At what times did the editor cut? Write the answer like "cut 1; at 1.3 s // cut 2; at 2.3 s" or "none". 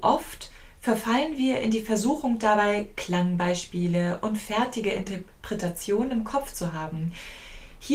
none